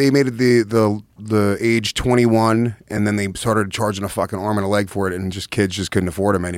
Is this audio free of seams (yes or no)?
yes